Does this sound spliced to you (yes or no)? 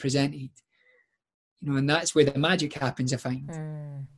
no